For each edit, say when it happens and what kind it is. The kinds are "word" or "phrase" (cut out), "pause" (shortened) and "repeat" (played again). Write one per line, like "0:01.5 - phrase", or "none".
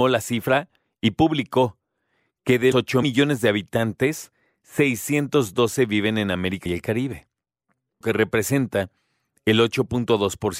0:02.7 - word
0:03.0 - word
0:06.7 - word
0:08.0 - word

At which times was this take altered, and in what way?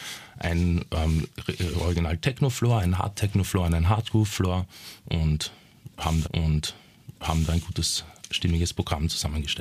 0:06.2 - repeat

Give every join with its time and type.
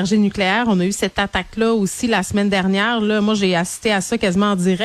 none

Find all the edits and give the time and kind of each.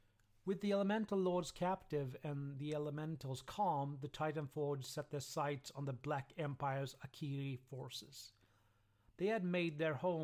none

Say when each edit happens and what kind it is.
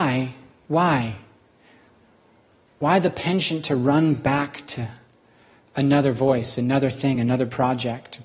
none

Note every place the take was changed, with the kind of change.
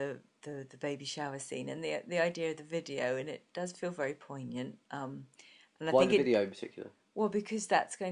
none

